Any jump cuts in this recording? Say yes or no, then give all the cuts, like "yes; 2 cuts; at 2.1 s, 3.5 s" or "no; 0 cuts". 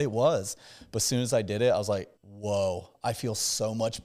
yes; 1 cut; at 2.2 s